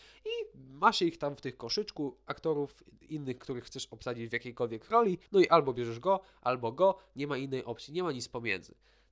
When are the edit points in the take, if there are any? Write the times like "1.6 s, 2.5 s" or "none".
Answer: 5.3 s